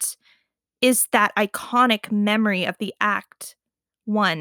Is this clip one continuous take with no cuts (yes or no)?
yes